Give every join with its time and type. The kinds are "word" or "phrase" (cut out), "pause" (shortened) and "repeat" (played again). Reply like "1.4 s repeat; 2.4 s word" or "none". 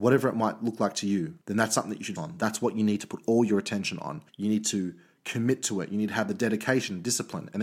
1.4 s pause; 2.2 s word; 4.3 s pause